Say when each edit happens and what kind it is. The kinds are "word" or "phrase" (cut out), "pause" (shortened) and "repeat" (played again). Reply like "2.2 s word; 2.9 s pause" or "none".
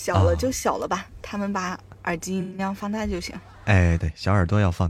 4.0 s phrase